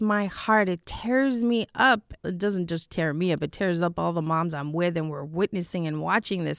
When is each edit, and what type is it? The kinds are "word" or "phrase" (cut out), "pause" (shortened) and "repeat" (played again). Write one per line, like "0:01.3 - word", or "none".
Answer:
0:02.2 - word